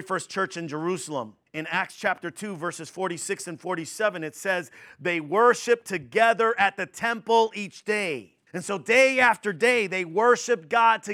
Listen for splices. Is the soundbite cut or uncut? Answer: cut